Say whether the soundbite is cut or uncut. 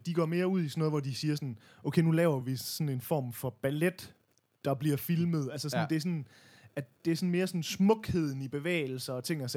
uncut